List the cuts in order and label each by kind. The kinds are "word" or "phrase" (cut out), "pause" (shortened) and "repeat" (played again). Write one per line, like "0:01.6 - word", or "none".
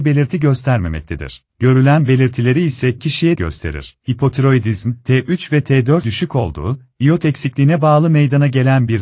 0:01.5 - pause
0:03.0 - word
0:03.4 - word
0:04.0 - pause
0:06.0 - word